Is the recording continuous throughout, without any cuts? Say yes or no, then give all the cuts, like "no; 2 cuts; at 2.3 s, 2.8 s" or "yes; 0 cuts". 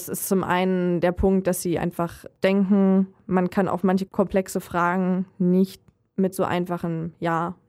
yes; 0 cuts